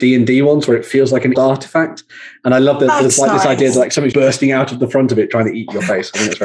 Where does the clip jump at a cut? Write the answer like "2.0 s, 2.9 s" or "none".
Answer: 1.3 s, 4.1 s